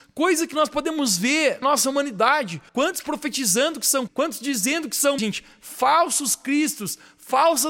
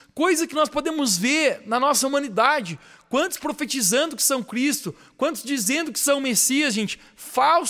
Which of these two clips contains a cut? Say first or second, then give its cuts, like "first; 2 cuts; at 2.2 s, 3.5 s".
first; 4 cuts; at 1.6 s, 2.7 s, 4.1 s, 5.2 s